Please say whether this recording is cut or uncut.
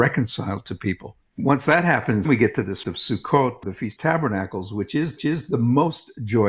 cut